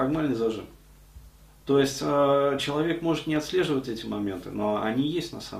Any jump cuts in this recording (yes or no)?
yes